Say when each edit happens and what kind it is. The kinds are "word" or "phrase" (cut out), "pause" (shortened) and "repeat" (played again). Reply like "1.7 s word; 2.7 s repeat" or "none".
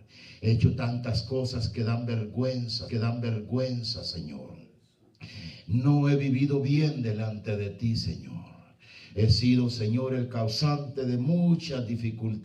2.9 s repeat